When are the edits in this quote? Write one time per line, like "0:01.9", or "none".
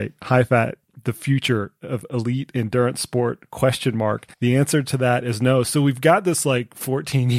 0:04.3